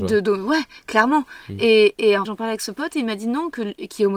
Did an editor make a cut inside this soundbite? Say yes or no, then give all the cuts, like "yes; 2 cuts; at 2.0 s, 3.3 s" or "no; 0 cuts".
yes; 1 cut; at 2.3 s